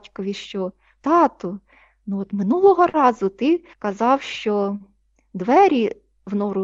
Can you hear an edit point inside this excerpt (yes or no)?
yes